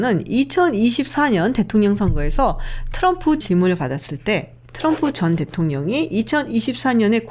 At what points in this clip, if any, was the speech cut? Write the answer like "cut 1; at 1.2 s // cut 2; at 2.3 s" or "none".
cut 1; at 3.4 s